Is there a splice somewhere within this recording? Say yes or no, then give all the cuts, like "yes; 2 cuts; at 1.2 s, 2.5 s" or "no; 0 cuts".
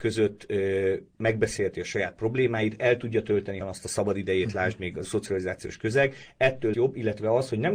yes; 4 cuts; at 1.1 s, 3.6 s, 5.0 s, 6.7 s